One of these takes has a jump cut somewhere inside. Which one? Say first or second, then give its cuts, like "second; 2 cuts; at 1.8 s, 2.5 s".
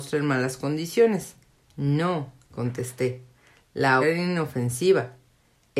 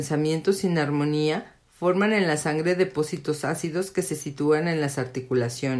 first; 2 cuts; at 1.6 s, 4.0 s